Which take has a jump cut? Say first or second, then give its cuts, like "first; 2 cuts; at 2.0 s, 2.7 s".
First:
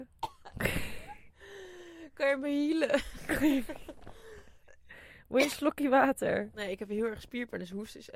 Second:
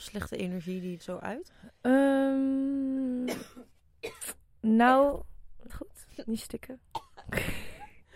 second; 2 cuts; at 1.0 s, 5.7 s